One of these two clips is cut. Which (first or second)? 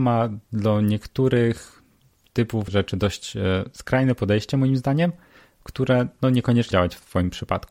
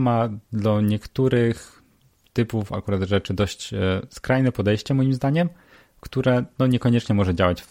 first